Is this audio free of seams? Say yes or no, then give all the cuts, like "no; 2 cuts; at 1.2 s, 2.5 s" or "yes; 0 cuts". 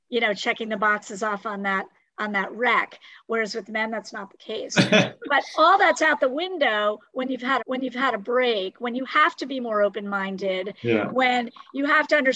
no; 1 cut; at 7.6 s